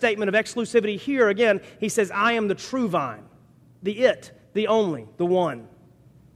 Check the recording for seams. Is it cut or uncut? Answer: uncut